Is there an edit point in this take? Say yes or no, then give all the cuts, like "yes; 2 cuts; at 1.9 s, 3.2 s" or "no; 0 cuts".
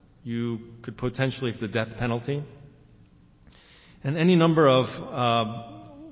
yes; 1 cut; at 1.6 s